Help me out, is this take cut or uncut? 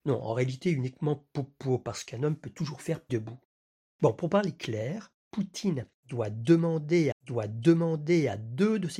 cut